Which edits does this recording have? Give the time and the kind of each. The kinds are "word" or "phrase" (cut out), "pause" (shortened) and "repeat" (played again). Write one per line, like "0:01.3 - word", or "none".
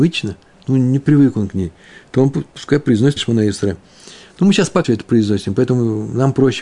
0:03.2 - word
0:04.8 - word